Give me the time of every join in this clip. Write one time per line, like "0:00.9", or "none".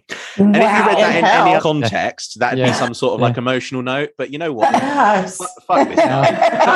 0:01.6